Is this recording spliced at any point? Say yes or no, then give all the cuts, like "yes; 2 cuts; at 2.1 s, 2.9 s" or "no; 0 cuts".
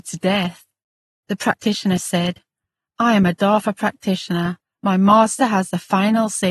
no; 0 cuts